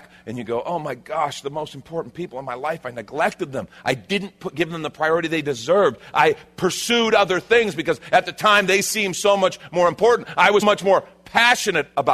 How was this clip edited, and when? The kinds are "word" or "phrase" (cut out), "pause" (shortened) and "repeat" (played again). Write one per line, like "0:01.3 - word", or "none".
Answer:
0:10.6 - word

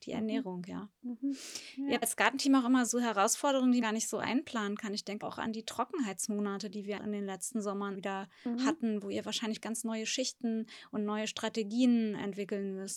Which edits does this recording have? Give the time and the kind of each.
0:02.0 - word
0:02.9 - word
0:03.8 - word
0:05.2 - word
0:07.0 - word
0:07.9 - word
0:09.6 - word

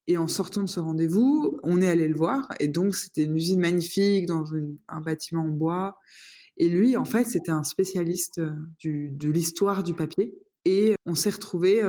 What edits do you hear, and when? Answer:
0:01.6 - word
0:11.0 - word

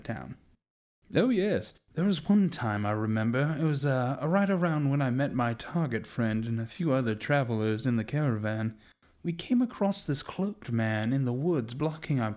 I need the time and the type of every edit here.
none

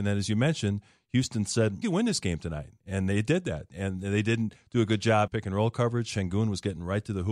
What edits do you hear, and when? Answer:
0:01.8 - word
0:02.8 - pause
0:05.3 - word

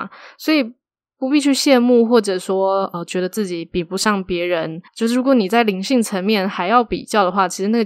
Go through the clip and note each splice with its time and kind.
0:04.9 - pause

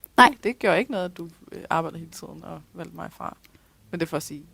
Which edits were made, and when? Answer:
0:02.7 - pause

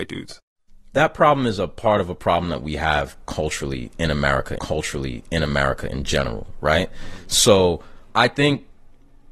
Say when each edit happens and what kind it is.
0:04.6 - repeat
0:08.1 - word

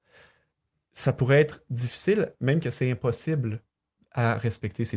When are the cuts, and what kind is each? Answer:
none

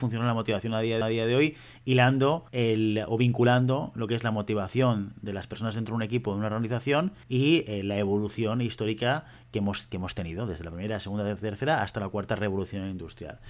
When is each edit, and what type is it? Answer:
0:01.0 - repeat
0:02.5 - pause
0:07.2 - pause

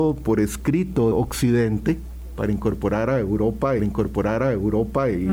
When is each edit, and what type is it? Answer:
0:01.1 - word
0:03.8 - repeat

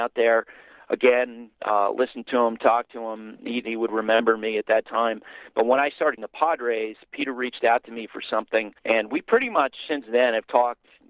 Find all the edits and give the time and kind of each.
0:01.5 - pause
0:03.6 - phrase
0:06.2 - word
0:08.8 - pause

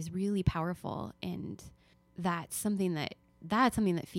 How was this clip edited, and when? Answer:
0:01.9 - pause

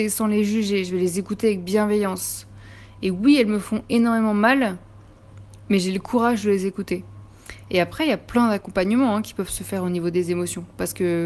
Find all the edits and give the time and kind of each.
none

